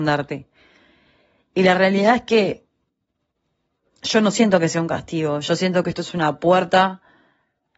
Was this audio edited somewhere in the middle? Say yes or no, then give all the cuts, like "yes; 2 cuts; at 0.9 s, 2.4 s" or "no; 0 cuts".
no; 0 cuts